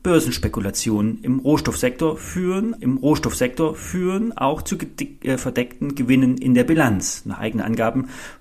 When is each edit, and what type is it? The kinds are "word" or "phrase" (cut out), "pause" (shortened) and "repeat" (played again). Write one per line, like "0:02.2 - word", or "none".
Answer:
0:02.8 - repeat